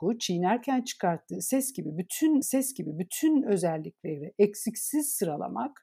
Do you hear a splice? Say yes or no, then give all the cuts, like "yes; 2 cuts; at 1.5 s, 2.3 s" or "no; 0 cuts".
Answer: yes; 1 cut; at 2.4 s